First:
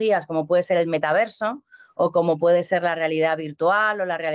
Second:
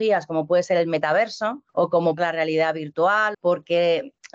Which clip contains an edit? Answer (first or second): second